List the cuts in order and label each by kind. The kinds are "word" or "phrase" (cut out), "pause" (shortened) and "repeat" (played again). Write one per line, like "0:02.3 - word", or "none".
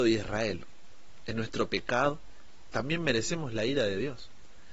0:02.7 - word